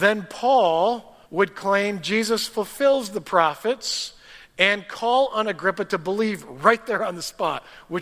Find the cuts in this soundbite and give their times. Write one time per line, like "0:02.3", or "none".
0:01.2